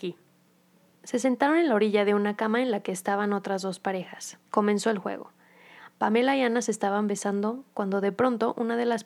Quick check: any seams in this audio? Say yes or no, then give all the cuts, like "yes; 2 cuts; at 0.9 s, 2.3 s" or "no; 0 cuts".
yes; 1 cut; at 4.4 s